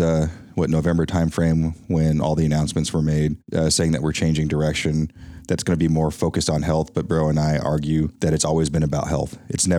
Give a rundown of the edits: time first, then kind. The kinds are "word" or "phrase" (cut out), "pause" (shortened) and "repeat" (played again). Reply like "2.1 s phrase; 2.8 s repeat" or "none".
3.4 s pause; 8.2 s pause